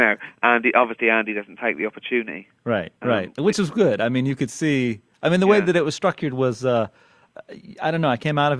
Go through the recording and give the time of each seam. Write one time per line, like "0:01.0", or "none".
0:03.0